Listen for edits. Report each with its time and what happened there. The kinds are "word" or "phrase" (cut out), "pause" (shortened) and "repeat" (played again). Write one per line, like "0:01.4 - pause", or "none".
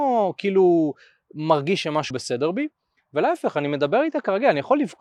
0:02.1 - word